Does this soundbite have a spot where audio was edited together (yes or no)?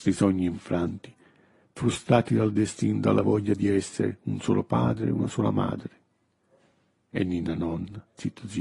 no